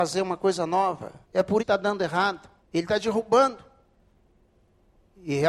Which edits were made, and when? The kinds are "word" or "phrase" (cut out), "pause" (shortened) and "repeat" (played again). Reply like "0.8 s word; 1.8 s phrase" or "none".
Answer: 1.2 s pause; 1.6 s word; 2.6 s pause